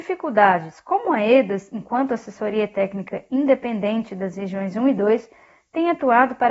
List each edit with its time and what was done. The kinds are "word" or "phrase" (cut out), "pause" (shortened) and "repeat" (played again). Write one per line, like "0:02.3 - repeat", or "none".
none